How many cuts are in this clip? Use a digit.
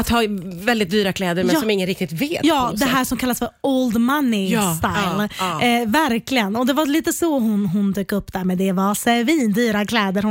0